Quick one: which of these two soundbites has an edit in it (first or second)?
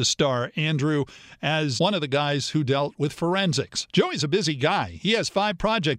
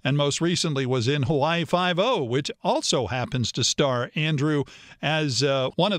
first